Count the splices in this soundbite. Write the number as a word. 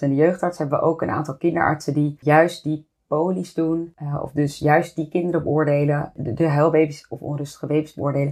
zero